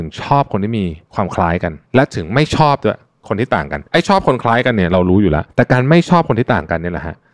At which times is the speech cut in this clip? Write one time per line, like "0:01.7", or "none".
0:01.0
0:01.8
0:03.9
0:05.5